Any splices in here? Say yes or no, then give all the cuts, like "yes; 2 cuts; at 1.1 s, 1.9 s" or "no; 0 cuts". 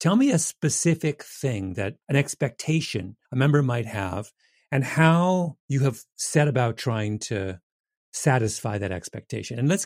yes; 3 cuts; at 2.0 s, 3.2 s, 5.6 s